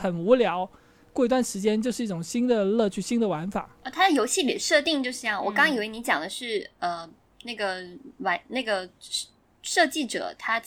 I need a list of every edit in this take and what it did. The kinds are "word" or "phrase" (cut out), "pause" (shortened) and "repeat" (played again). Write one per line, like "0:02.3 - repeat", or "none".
none